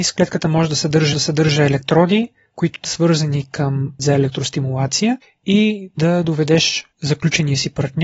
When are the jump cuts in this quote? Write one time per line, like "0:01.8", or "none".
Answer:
0:01.1
0:02.8
0:04.0
0:05.2
0:06.9